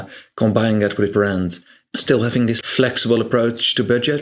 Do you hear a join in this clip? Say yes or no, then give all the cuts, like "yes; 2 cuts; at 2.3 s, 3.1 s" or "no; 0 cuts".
yes; 3 cuts; at 1.1 s, 1.9 s, 2.6 s